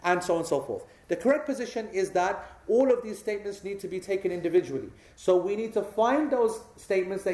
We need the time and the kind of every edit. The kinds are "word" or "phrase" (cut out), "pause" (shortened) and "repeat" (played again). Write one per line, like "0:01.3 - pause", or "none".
none